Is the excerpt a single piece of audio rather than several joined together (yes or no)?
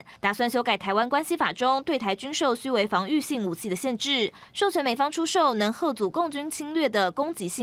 yes